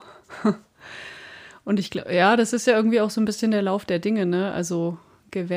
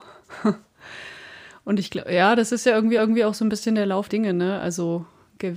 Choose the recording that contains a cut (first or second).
second